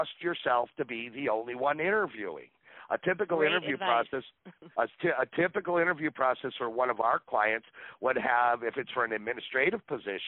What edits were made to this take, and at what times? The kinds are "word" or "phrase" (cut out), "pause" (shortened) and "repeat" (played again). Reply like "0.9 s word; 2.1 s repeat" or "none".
4.7 s pause